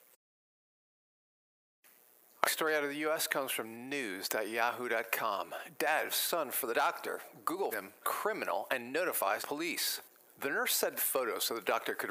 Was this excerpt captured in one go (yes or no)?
no